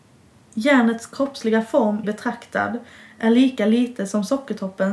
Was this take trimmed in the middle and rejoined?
yes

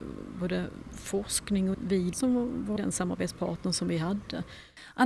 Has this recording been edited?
yes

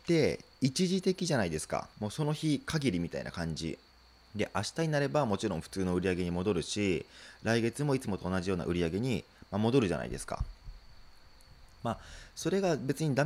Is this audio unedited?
no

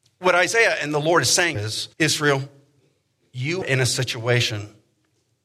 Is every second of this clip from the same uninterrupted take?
no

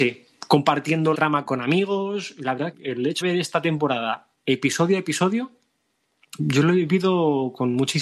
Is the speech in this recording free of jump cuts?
no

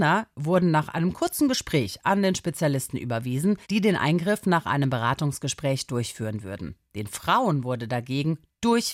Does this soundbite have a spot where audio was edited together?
yes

